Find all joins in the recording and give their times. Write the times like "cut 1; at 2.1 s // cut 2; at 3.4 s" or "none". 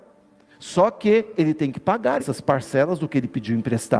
cut 1; at 2.2 s